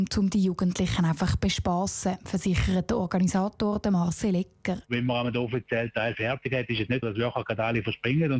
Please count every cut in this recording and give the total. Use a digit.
1